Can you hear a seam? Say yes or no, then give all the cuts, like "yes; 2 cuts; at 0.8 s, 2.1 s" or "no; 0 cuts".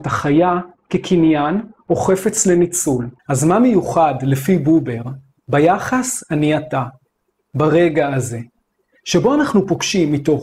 yes; 1 cut; at 3.2 s